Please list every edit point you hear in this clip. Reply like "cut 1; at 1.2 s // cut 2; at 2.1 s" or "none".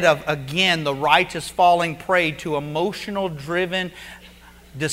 none